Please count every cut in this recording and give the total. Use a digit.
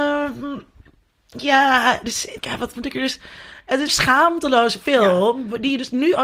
2